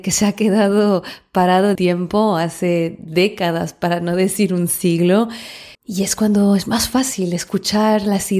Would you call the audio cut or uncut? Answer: cut